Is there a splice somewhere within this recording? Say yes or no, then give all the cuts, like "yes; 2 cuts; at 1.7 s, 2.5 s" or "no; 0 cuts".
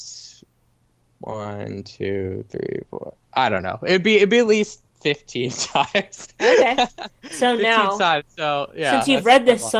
yes; 2 cuts; at 4.9 s, 7.2 s